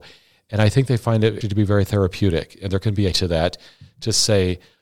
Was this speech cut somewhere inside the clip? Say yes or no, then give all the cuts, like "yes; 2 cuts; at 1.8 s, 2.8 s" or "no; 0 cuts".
yes; 2 cuts; at 1.4 s, 3.1 s